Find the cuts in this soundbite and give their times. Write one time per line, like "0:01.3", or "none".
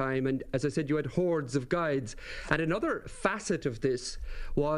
none